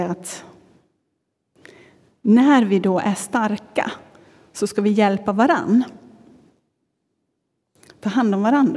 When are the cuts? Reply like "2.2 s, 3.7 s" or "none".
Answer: none